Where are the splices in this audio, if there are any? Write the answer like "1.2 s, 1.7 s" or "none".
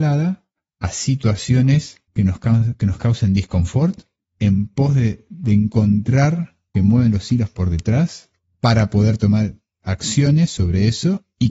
2.1 s, 6.7 s